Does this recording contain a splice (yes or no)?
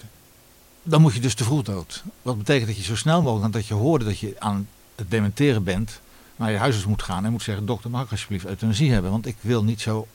no